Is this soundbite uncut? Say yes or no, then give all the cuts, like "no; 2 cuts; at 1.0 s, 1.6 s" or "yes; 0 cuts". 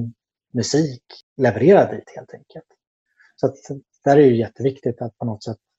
yes; 0 cuts